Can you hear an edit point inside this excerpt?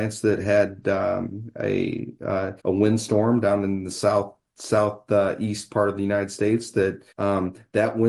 yes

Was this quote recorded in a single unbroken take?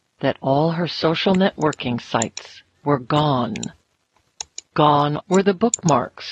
no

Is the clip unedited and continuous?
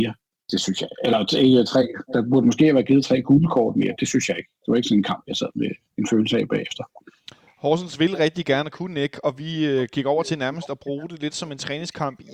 yes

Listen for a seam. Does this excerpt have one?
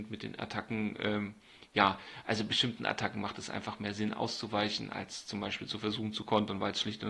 no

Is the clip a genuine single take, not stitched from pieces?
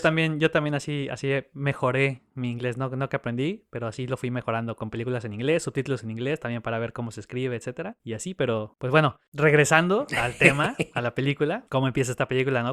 yes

